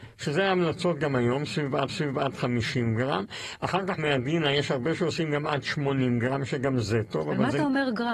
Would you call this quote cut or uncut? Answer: cut